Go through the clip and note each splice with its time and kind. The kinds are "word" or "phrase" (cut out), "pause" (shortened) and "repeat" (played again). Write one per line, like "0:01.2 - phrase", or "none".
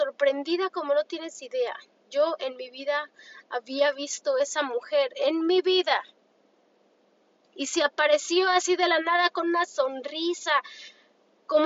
none